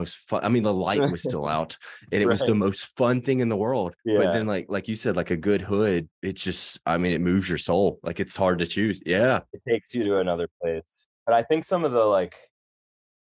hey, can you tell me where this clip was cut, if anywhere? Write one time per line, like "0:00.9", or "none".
0:04.0
0:06.1
0:11.2